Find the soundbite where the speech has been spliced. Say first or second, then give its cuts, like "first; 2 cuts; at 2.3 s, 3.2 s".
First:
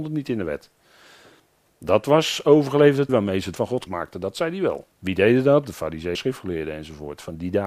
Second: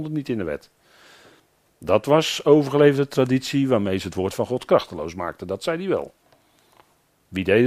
first; 5 cuts; at 3.1 s, 3.6 s, 3.9 s, 4.9 s, 6.1 s